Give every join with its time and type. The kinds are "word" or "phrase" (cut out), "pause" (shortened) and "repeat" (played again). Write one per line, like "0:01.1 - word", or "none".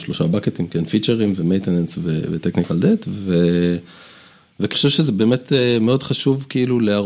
0:04.7 - word